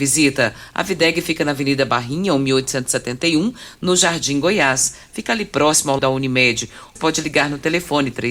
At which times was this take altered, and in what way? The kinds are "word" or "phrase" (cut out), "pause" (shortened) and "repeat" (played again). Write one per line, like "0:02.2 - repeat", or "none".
0:06.0 - word
0:07.0 - word